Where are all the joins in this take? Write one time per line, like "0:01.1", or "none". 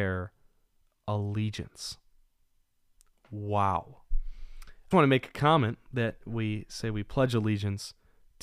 0:04.9